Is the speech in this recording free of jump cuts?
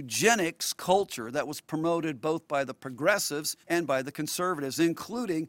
no; 1 cut; at 3.6 s

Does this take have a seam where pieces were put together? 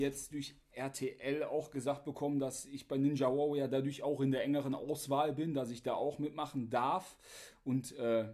no; 0 cuts

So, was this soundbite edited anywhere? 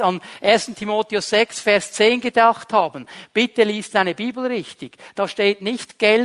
no; 0 cuts

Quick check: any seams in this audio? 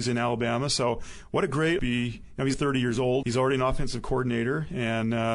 yes; 3 cuts; at 1.8 s, 2.5 s, 3.2 s

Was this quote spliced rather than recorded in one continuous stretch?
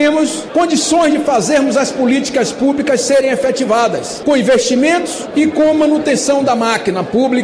no; 0 cuts

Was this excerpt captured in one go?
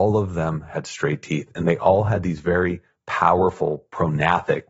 yes; 0 cuts

